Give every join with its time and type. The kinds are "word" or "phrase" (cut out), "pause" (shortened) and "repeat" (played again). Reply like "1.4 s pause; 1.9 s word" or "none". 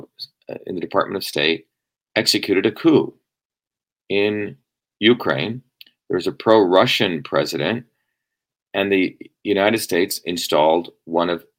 none